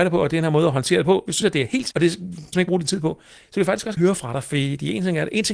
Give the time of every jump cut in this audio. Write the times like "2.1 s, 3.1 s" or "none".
1.4 s, 1.9 s, 2.5 s, 4.0 s